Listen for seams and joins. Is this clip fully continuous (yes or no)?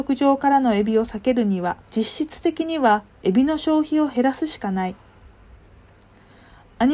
no